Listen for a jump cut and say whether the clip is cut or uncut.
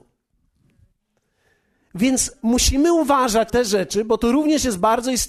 cut